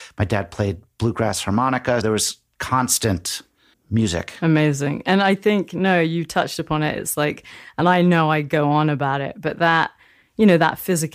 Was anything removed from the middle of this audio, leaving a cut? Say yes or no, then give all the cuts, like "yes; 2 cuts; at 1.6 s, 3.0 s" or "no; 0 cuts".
yes; 2 cuts; at 2.0 s, 3.7 s